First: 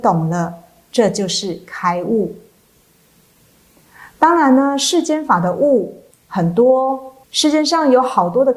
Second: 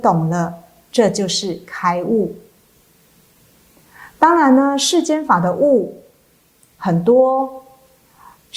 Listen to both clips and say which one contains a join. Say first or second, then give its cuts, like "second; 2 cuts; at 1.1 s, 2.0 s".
first; 2 cuts; at 6.1 s, 7.2 s